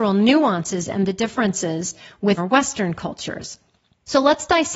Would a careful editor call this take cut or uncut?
cut